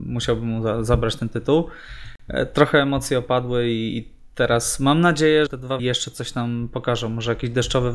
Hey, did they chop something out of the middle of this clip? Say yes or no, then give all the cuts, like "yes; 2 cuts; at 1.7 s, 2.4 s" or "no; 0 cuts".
yes; 2 cuts; at 5.5 s, 5.8 s